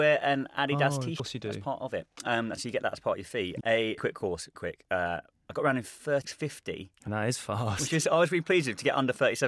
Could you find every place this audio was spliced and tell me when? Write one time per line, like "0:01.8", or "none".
0:01.2
0:02.6
0:03.6
0:04.0
0:04.5
0:06.2
0:07.1